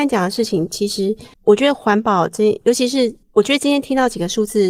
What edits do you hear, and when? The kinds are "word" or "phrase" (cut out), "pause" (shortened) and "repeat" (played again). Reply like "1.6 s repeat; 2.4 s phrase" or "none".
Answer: 1.3 s pause; 3.2 s pause